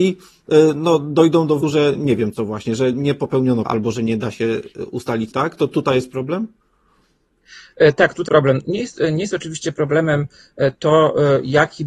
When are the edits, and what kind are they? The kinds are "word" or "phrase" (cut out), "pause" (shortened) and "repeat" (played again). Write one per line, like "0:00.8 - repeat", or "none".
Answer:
0:01.6 - word
0:03.6 - word
0:05.3 - word
0:08.3 - word